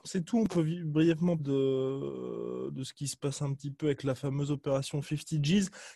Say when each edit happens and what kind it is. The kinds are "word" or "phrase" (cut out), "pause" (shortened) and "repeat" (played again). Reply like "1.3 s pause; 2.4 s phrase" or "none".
1.4 s word